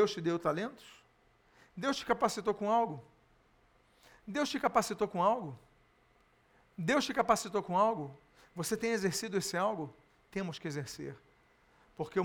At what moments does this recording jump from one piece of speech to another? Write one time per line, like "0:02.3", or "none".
none